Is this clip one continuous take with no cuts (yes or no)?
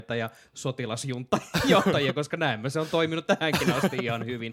yes